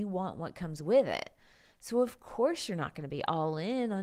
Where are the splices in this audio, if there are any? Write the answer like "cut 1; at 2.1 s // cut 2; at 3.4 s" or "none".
none